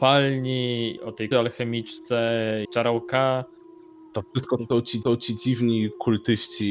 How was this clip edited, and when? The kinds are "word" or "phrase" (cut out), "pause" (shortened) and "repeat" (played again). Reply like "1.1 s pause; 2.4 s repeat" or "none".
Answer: 1.0 s word; 1.3 s word; 2.7 s phrase; 5.0 s repeat